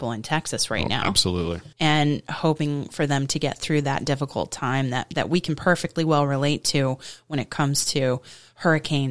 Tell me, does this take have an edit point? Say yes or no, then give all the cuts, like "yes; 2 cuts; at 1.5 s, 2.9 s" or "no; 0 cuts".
yes; 1 cut; at 1.7 s